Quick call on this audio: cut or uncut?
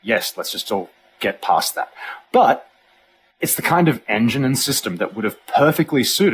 uncut